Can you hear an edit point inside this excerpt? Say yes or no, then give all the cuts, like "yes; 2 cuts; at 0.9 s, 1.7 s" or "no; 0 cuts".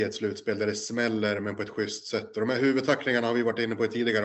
no; 0 cuts